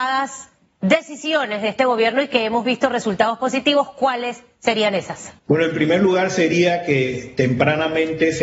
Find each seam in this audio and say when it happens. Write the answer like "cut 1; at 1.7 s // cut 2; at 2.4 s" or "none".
cut 1; at 5.4 s